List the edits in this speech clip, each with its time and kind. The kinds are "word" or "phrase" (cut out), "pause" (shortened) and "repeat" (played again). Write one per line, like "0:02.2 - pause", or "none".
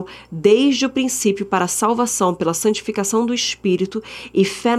none